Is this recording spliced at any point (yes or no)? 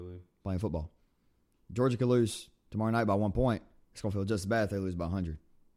no